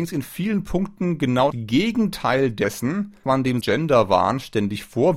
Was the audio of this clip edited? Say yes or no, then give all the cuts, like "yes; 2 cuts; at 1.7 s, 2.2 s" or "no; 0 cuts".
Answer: yes; 3 cuts; at 1.5 s, 3.2 s, 3.6 s